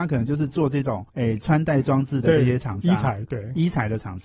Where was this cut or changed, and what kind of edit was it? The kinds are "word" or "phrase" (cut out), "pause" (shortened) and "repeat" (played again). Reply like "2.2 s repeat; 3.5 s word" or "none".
1.1 s pause